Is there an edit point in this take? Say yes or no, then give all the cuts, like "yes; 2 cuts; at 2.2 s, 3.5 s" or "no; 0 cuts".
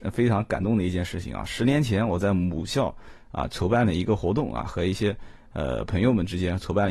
no; 0 cuts